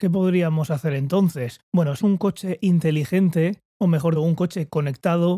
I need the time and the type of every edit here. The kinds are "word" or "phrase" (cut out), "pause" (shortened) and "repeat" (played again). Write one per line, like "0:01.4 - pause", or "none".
0:02.0 - word
0:03.7 - pause
0:04.1 - word